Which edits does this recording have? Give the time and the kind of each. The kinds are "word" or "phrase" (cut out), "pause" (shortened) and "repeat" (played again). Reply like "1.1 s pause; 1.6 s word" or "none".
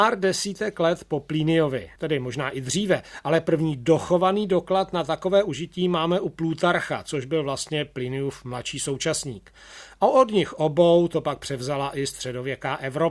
2.0 s pause